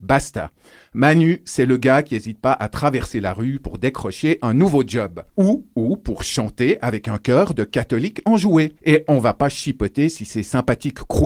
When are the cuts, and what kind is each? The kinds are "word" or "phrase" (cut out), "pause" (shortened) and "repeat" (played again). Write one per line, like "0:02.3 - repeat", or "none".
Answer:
0:05.3 - pause
0:08.8 - pause